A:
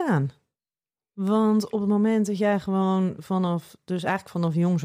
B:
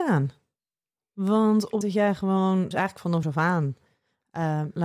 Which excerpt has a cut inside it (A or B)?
B